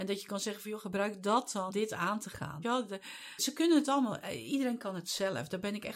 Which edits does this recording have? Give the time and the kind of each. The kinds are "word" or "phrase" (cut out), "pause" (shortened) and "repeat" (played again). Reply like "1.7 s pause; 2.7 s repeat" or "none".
1.7 s word; 2.6 s word; 3.4 s word